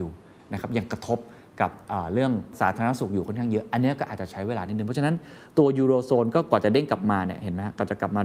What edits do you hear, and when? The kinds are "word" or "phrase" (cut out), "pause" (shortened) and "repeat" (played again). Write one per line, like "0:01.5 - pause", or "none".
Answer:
none